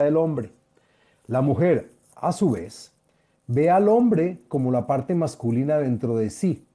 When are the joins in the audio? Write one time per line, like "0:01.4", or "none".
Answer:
none